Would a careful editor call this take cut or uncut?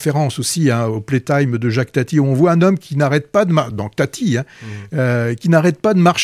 uncut